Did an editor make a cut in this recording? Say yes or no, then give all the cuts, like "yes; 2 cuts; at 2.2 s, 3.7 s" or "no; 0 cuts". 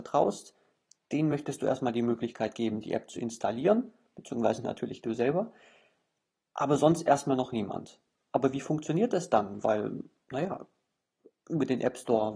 no; 0 cuts